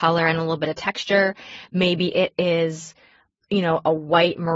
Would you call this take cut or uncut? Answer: uncut